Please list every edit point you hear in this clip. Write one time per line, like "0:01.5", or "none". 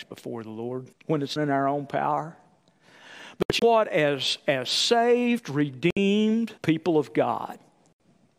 0:00.9
0:01.4
0:03.6
0:06.6